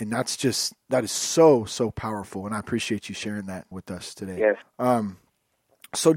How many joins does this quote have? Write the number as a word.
two